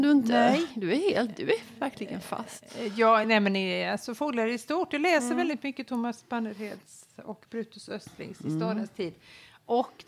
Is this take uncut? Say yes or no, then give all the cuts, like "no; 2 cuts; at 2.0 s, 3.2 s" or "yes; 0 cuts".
yes; 0 cuts